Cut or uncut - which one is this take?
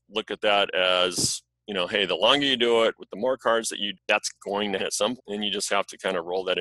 cut